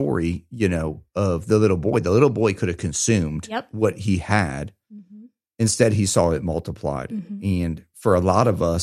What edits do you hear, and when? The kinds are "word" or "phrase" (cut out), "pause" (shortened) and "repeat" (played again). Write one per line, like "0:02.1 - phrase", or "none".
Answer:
none